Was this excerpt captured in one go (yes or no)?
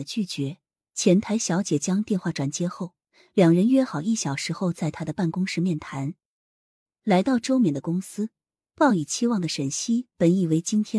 yes